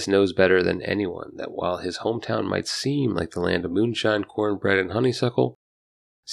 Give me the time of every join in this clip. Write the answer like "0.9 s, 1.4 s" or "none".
none